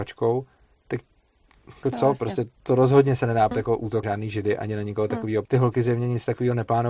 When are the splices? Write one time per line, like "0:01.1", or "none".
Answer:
0:01.8
0:02.6
0:03.5
0:04.0
0:05.5